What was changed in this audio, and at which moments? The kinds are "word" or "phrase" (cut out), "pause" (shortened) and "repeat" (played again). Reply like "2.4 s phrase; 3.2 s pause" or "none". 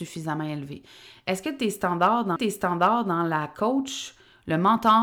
2.4 s repeat